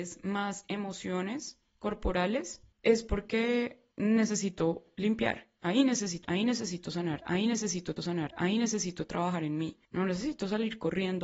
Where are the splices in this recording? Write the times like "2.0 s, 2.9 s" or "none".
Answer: 2.7 s, 3.9 s, 6.2 s, 8.0 s, 9.8 s